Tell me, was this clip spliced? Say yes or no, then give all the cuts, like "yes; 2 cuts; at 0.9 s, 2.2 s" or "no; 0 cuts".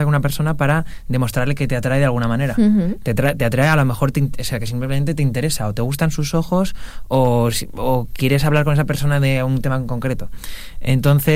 no; 0 cuts